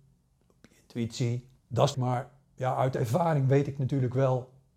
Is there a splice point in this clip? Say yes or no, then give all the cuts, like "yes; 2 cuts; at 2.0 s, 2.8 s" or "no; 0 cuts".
yes; 2 cuts; at 1.6 s, 1.9 s